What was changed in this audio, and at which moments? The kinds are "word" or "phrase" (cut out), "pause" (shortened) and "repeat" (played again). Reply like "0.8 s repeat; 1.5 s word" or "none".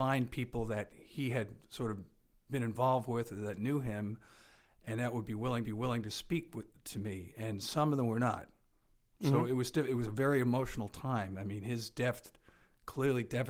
5.6 s repeat